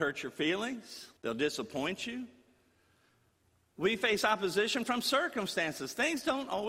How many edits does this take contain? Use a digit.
1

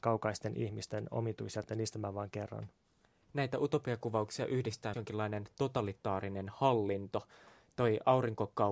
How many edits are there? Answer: 2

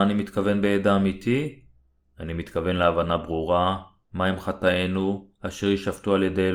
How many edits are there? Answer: 0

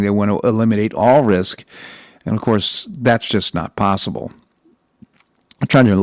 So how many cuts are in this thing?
0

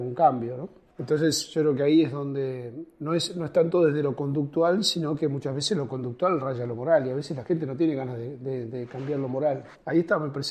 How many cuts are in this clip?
0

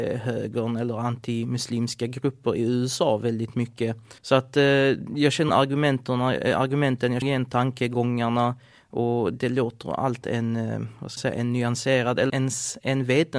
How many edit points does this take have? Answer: 7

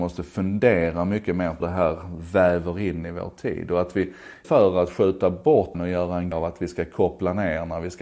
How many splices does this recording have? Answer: 4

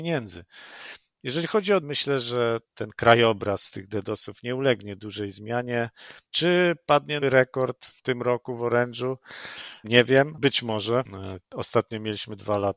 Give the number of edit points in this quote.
5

